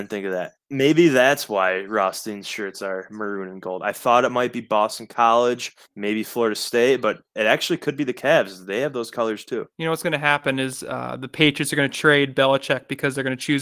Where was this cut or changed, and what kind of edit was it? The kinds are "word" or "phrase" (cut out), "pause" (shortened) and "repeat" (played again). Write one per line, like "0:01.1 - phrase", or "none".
0:05.8 - pause
0:07.3 - pause

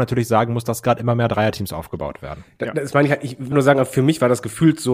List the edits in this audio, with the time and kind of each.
0:03.5 - word

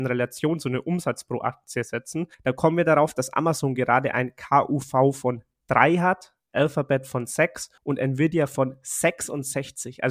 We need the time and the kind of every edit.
0:02.3 - pause
0:07.8 - pause

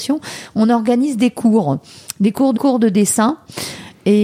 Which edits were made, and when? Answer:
0:02.6 - phrase

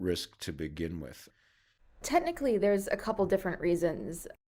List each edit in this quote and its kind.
none

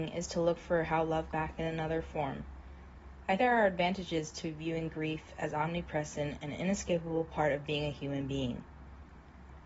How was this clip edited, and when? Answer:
0:01.3 - word
0:03.4 - word

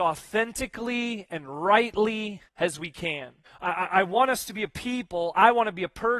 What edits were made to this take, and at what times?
0:02.5 - pause
0:03.4 - pause

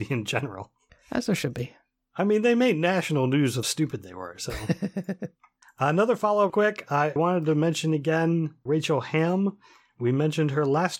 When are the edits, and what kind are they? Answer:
0:03.6 - word
0:06.5 - word
0:07.2 - word
0:08.7 - word

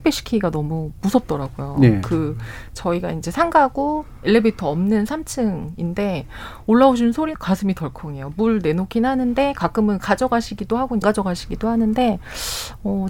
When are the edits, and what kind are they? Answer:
0:07.3 - word
0:10.0 - word
0:11.0 - word

